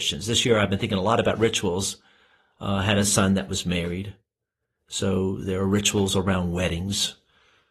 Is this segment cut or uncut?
uncut